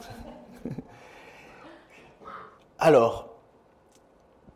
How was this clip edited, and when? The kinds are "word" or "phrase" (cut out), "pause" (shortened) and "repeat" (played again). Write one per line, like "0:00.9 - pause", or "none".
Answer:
0:02.6 - pause